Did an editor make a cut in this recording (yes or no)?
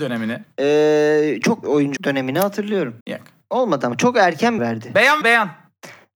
yes